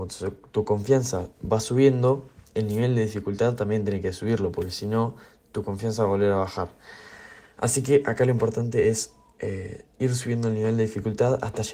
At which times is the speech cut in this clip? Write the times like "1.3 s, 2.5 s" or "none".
none